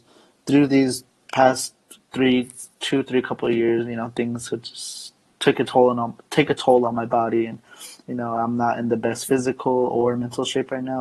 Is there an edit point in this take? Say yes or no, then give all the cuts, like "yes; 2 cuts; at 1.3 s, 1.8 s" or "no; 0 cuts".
no; 0 cuts